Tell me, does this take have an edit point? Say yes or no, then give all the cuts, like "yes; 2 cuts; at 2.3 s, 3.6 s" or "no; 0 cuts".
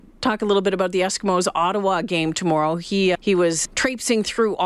yes; 2 cuts; at 3.1 s, 3.6 s